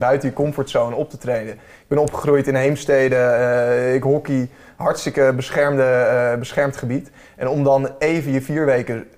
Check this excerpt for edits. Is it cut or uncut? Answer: uncut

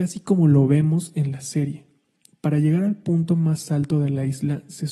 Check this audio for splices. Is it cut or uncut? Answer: uncut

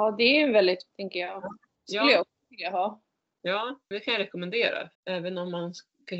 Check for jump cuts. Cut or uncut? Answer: cut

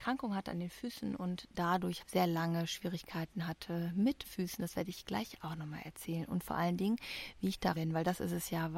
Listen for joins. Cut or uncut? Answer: cut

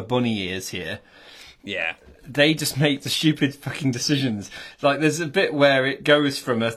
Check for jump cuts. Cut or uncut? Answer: uncut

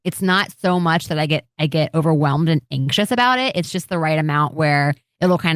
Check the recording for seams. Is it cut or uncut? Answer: uncut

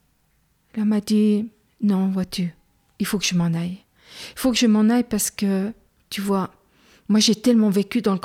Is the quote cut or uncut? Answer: uncut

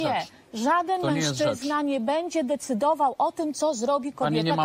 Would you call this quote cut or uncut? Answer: uncut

